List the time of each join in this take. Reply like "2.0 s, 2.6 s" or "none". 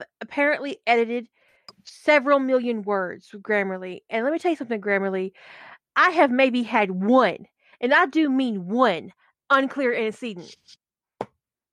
none